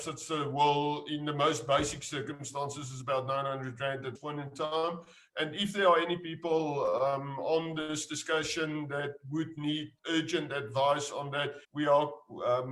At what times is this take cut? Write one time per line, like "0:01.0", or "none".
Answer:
0:04.2
0:10.0
0:11.6

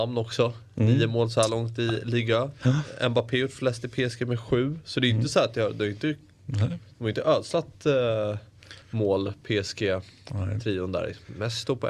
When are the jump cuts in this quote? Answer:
0:08.8

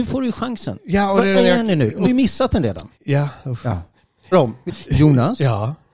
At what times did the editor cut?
0:01.3
0:02.0
0:02.9
0:04.3
0:04.7

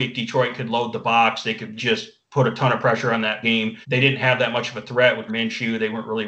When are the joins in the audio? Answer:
0:01.8
0:03.4
0:03.8
0:05.3

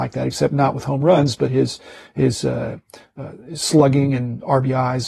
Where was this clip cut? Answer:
none

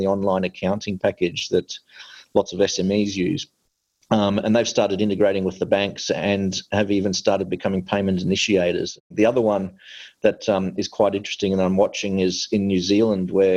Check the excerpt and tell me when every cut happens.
none

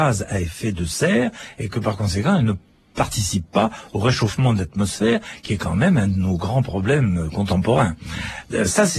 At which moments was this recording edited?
none

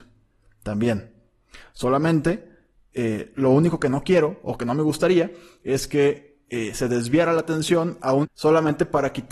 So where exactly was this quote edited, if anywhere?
0:08.2

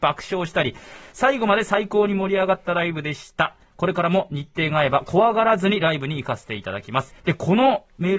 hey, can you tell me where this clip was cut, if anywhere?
0:07.2

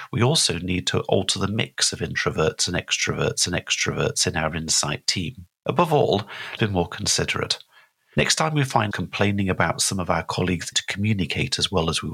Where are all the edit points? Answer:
0:03.5
0:05.6
0:06.6
0:08.9
0:10.7

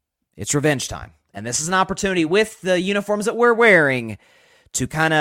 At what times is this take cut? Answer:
none

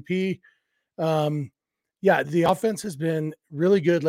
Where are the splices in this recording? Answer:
0:02.2

